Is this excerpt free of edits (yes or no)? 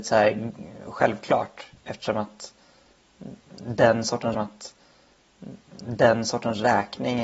no